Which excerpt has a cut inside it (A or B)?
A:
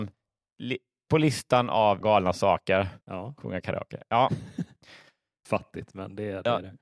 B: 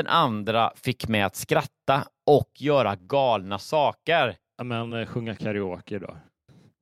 A